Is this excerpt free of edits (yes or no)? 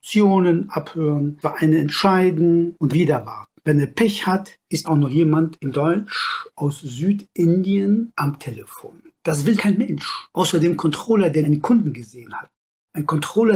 no